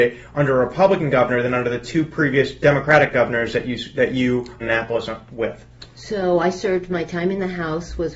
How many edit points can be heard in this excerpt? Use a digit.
1